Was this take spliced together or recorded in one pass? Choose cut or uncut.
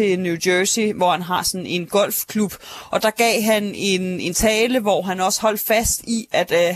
uncut